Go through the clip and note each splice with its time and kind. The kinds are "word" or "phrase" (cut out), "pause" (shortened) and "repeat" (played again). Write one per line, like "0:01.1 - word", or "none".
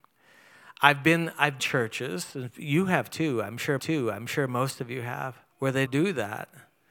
0:01.6 - phrase
0:03.8 - repeat
0:05.5 - pause
0:05.9 - word